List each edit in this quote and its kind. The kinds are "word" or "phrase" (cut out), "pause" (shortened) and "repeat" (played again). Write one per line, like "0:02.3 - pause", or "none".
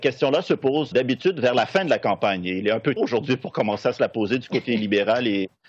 0:00.9 - word
0:03.0 - word